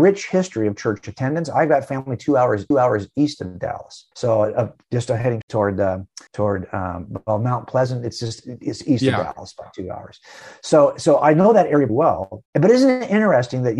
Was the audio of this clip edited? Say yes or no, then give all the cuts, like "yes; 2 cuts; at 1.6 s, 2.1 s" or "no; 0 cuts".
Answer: yes; 6 cuts; at 2.7 s, 4.1 s, 5.4 s, 6.3 s, 11.9 s, 12.5 s